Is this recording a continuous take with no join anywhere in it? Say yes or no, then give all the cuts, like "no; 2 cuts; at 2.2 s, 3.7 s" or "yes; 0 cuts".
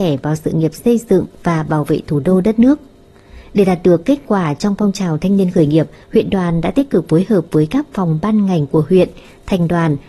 yes; 0 cuts